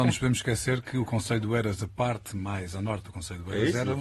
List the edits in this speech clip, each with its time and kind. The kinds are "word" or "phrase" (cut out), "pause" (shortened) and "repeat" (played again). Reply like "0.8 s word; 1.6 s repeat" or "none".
none

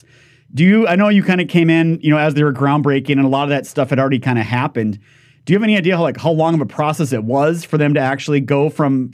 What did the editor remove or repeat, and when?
none

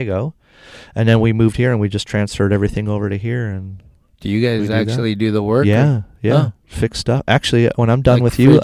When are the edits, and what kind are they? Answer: none

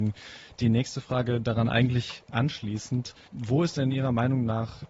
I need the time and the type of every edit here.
3.2 s pause

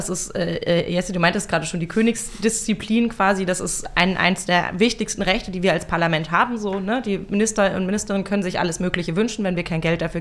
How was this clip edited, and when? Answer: none

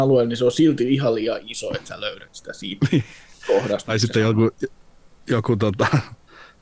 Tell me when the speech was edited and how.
none

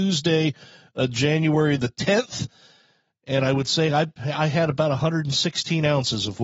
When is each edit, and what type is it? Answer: none

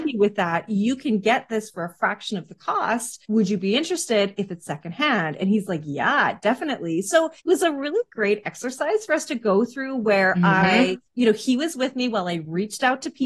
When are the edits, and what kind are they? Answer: 3.2 s pause; 7.4 s pause; 11.1 s pause

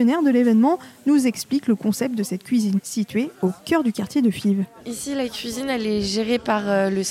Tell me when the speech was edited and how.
2.8 s word

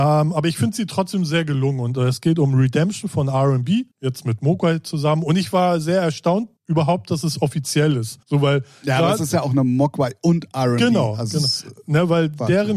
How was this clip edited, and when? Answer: 3.9 s pause; 6.6 s pause; 8.2 s pause

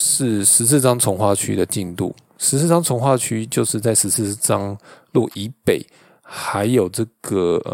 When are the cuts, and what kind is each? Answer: none

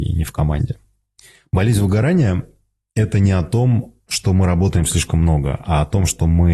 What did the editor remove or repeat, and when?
none

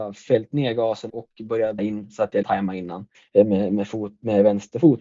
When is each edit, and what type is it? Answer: 1.1 s phrase; 1.8 s word; 2.4 s word; 3.1 s pause

